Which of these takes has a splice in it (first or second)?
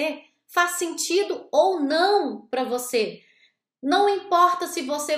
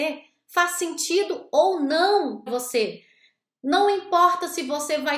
second